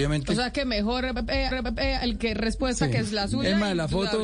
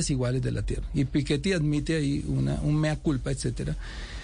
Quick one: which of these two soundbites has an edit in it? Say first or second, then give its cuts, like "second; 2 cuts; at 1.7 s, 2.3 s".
first; 1 cut; at 1.5 s